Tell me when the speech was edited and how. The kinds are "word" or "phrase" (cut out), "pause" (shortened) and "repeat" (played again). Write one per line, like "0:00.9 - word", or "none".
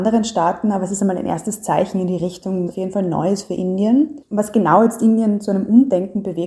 0:02.7 - word
0:04.2 - pause

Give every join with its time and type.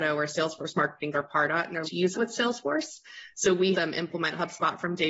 0:01.1 - word
0:01.8 - word
0:02.1 - word
0:03.7 - word

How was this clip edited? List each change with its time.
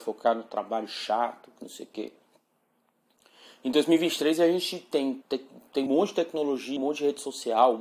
0:05.2 - word
0:05.9 - word
0:06.8 - word

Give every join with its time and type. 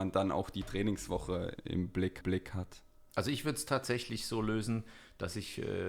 0:01.6 - word
0:02.2 - repeat

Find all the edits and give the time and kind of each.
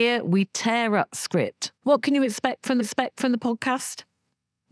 0:01.1 - word
0:01.7 - pause
0:02.8 - repeat

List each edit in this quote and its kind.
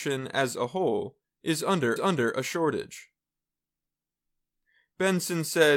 0:02.0 - repeat

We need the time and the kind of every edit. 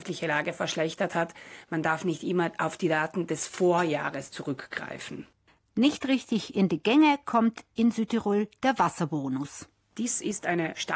none

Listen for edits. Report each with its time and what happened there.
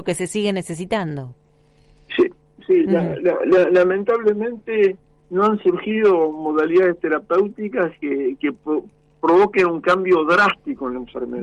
none

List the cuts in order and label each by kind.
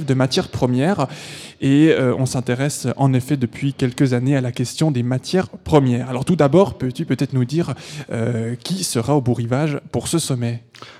none

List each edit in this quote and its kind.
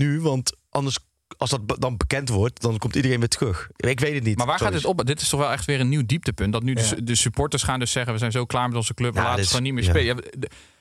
none

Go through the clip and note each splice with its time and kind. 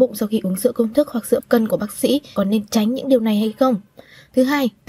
0:01.4 - word
0:01.7 - phrase
0:02.4 - phrase

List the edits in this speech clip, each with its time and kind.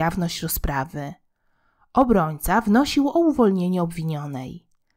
none

